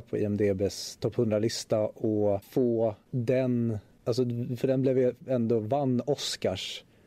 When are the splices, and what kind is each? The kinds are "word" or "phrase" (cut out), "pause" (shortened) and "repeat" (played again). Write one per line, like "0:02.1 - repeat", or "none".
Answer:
none